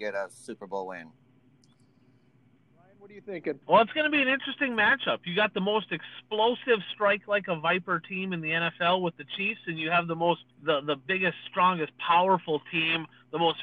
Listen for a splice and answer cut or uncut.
cut